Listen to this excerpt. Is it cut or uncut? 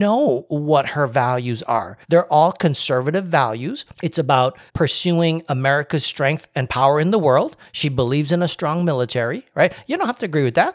cut